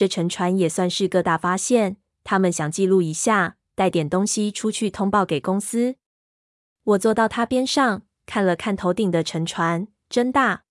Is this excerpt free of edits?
yes; 0 cuts

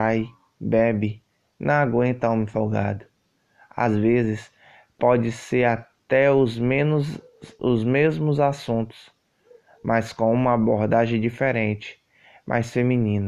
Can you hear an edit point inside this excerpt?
no; 0 cuts

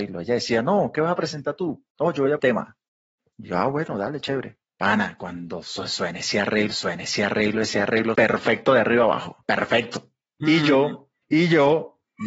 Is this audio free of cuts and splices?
no; 5 cuts; at 2.4 s, 4.6 s, 6.7 s, 8.1 s, 9.4 s

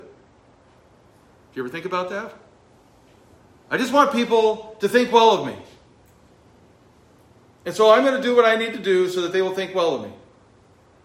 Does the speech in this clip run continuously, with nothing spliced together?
yes; 0 cuts

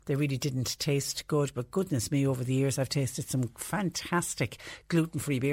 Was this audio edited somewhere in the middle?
no; 0 cuts

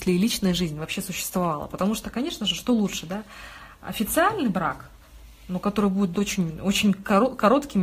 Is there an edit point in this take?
no; 0 cuts

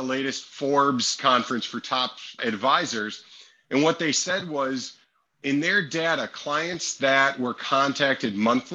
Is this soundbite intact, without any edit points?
yes; 0 cuts

